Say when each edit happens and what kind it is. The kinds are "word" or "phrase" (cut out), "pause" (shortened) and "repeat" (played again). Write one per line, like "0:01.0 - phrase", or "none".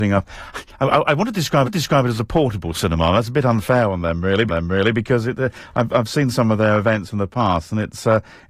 0:01.6 - repeat
0:04.5 - repeat